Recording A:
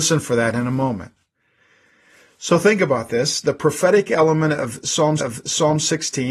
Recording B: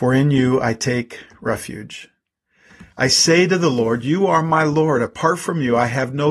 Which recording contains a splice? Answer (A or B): A